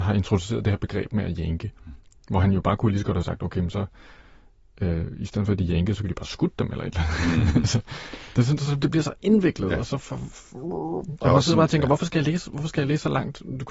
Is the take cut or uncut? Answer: uncut